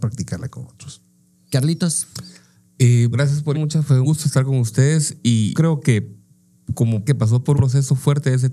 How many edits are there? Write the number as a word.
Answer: six